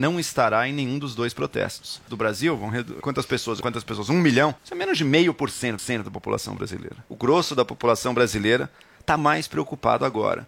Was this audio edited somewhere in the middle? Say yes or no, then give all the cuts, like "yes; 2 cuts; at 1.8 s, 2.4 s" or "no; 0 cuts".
yes; 7 cuts; at 2.1 s, 3.0 s, 3.6 s, 4.6 s, 5.8 s, 7.1 s, 9.2 s